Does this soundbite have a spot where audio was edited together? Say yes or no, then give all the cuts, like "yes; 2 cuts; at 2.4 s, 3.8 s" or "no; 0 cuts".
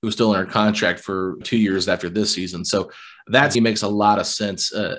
yes; 2 cuts; at 1.4 s, 3.5 s